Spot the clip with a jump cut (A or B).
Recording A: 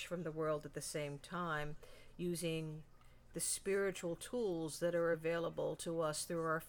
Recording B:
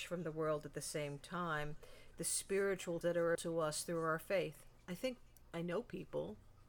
B